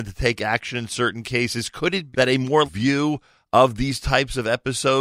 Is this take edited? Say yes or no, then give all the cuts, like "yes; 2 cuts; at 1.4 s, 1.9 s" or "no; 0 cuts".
yes; 2 cuts; at 2.1 s, 2.6 s